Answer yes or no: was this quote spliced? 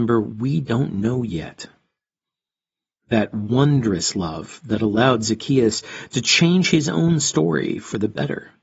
no